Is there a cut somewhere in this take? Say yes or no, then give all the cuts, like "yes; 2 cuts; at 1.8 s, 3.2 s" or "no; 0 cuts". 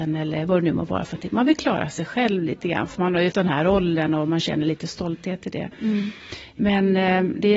yes; 1 cut; at 3.3 s